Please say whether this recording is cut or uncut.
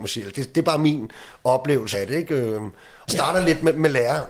cut